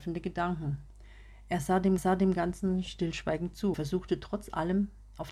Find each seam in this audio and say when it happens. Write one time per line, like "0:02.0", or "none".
0:02.0
0:03.7